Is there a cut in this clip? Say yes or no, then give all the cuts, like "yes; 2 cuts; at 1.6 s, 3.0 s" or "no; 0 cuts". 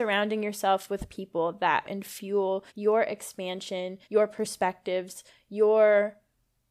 yes; 3 cuts; at 1.8 s, 2.7 s, 4.0 s